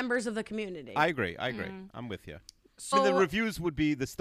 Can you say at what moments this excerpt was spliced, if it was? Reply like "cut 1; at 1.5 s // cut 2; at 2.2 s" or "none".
cut 1; at 2.9 s